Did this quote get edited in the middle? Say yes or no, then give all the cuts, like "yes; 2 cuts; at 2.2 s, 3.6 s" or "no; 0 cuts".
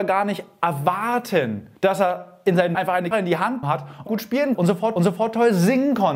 yes; 7 cuts; at 1.8 s, 2.7 s, 3.1 s, 3.6 s, 4.1 s, 4.5 s, 5.0 s